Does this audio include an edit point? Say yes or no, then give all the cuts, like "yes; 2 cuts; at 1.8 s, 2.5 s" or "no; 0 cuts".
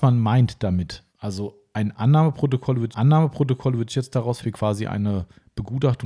yes; 3 cuts; at 1.1 s, 2.9 s, 4.4 s